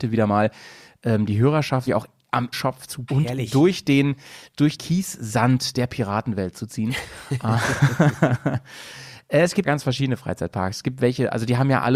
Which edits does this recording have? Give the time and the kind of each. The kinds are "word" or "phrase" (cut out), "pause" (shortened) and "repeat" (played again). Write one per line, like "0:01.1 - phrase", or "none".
0:01.9 - word
0:02.5 - word
0:03.1 - word
0:04.8 - word
0:09.6 - word